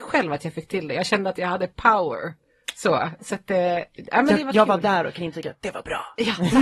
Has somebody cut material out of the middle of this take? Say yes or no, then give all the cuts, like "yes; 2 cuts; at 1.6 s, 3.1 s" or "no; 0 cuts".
no; 0 cuts